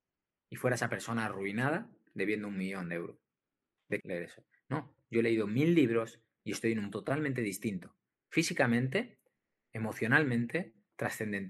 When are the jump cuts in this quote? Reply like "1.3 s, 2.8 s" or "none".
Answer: 4.0 s, 6.9 s

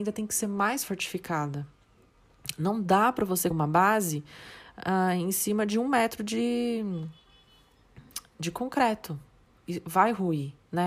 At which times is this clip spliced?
3.5 s

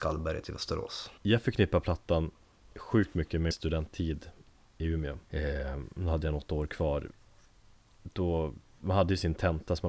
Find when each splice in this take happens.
1.2 s, 3.5 s, 5.3 s

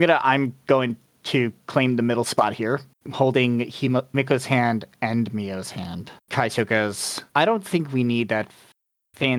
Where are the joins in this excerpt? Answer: 2.9 s, 6.2 s, 7.3 s

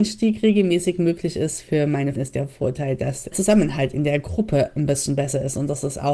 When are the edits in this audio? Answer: 2.2 s, 3.3 s

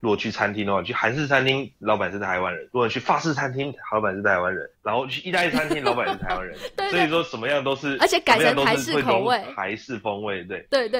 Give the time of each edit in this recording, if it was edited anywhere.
2.7 s, 4.7 s

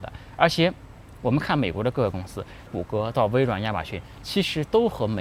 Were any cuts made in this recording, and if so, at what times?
2.7 s

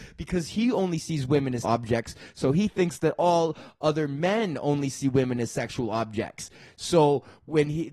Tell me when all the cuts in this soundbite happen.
1.6 s

